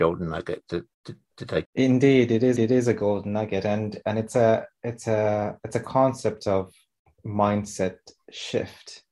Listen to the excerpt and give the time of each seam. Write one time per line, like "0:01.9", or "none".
0:00.9
0:01.6
0:02.6